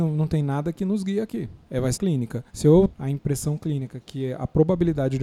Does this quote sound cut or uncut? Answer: cut